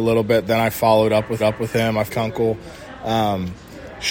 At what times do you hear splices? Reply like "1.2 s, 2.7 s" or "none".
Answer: 1.4 s, 2.1 s